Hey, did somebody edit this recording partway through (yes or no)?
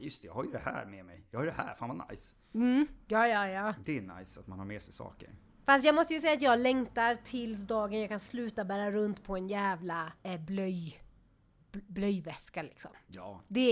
yes